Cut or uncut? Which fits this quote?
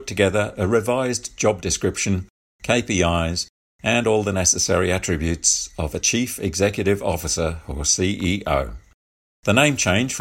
uncut